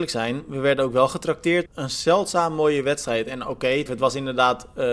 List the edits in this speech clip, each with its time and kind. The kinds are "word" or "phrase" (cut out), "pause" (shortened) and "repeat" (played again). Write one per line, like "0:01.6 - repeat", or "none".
0:01.7 - word
0:03.9 - word